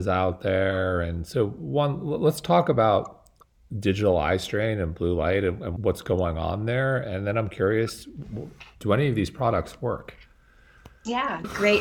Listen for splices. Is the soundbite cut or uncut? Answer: uncut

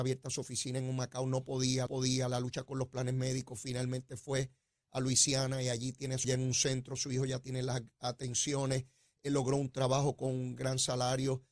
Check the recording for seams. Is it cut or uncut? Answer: cut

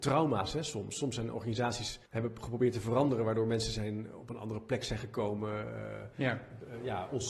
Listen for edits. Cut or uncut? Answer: cut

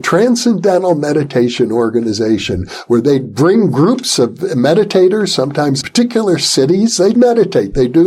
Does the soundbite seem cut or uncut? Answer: cut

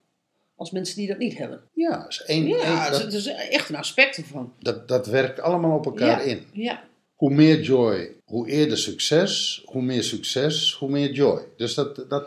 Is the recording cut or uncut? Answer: cut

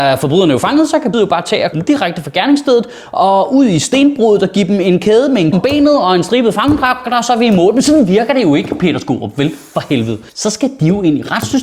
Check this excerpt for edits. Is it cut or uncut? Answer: cut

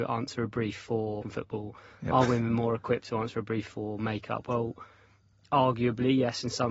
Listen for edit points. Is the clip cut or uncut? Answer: cut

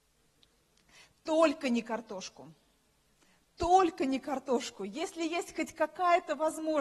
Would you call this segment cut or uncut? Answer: uncut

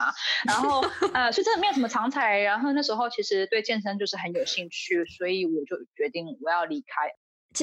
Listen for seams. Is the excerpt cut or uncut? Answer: uncut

